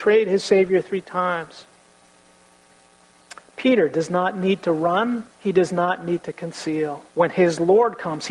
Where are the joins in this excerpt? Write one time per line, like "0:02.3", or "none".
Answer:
0:05.3
0:07.1